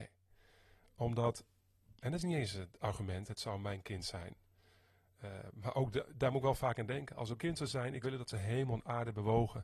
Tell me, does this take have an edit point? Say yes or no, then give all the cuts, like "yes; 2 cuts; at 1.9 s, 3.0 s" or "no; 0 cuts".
yes; 2 cuts; at 7.4 s, 8.0 s